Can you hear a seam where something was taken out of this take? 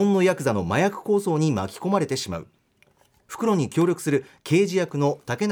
no; 0 cuts

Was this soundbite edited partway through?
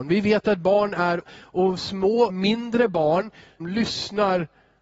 yes; 3 cuts; at 1.2 s, 2.3 s, 3.6 s

